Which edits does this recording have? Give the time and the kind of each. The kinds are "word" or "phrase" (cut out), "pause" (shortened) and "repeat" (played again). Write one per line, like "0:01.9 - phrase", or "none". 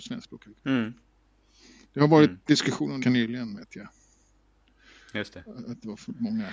0:03.0 - word